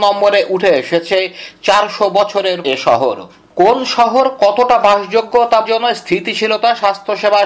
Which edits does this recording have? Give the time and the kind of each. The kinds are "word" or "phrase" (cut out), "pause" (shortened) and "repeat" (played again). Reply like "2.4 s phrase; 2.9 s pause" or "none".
2.6 s word; 5.7 s word